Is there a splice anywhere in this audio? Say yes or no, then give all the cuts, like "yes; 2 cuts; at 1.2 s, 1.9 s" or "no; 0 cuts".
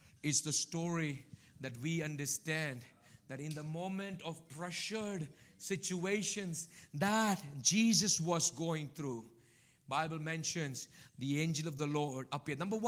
no; 0 cuts